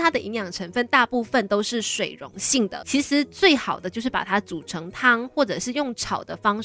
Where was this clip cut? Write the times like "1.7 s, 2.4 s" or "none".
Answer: 2.8 s